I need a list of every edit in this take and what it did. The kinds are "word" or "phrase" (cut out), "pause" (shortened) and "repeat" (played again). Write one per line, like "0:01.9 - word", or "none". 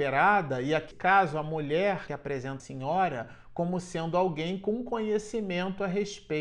0:00.9 - word
0:02.1 - word
0:02.6 - word